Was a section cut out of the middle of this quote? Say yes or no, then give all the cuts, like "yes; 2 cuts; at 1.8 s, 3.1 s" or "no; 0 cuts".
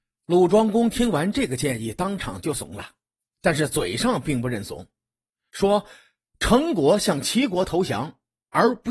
no; 0 cuts